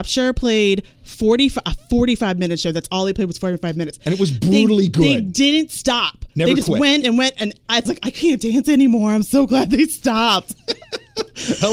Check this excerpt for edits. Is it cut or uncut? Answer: cut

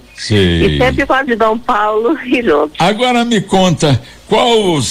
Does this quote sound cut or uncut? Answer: cut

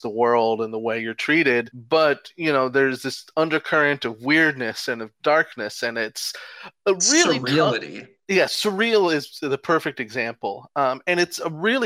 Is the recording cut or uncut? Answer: uncut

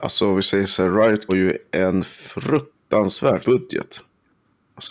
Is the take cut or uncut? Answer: cut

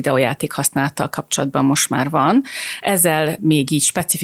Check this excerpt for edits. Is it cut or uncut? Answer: uncut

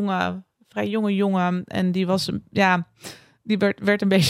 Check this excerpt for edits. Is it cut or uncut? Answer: uncut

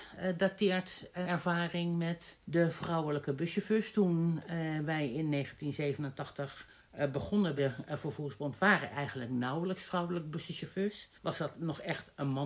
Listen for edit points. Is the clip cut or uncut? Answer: cut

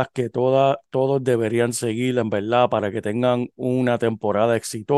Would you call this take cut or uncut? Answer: uncut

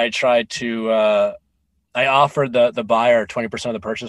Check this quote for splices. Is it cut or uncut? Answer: uncut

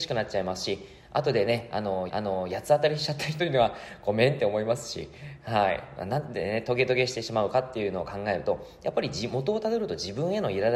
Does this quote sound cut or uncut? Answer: cut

